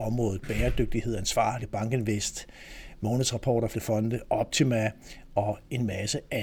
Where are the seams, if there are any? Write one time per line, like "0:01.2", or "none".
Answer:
0:01.6
0:03.7